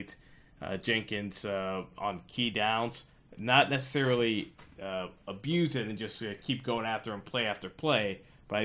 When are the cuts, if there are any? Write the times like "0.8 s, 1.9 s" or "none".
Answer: none

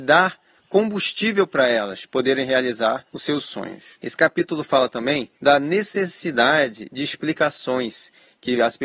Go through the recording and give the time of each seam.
3.1 s, 3.9 s, 5.3 s

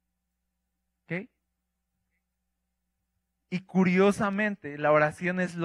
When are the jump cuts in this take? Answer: none

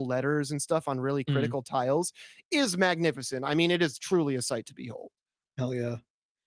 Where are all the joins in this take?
none

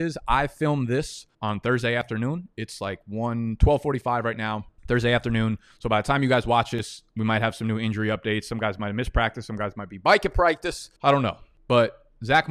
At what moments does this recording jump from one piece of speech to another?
1.3 s, 11.0 s

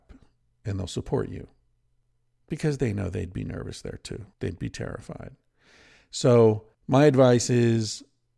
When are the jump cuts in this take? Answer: 4.3 s, 6.7 s

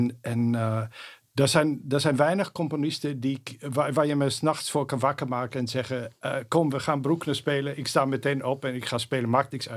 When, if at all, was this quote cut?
none

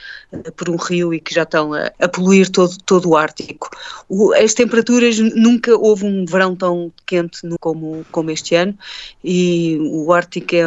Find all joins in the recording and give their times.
7.6 s

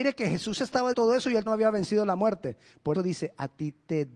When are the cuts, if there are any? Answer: 0.9 s, 1.5 s, 2.9 s

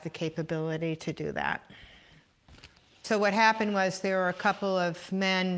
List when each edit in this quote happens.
none

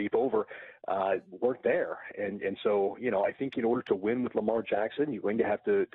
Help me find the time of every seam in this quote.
none

